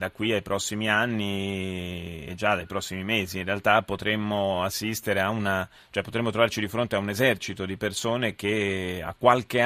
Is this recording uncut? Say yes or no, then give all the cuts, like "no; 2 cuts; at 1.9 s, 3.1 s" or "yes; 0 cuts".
yes; 0 cuts